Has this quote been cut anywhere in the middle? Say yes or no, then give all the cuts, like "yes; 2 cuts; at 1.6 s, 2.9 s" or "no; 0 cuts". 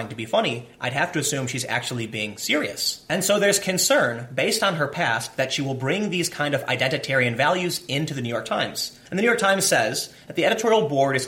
yes; 1 cut; at 9.1 s